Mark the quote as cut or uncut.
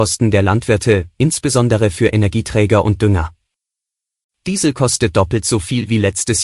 uncut